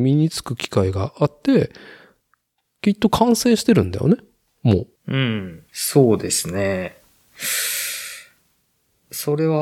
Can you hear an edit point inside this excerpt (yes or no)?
yes